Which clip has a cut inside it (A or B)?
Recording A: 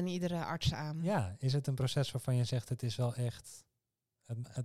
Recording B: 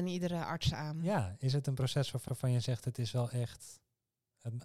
B